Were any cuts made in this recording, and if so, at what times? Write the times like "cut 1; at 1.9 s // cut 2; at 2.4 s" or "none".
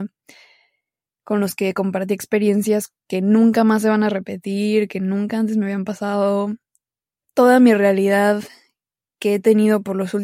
cut 1; at 3.0 s // cut 2; at 7.0 s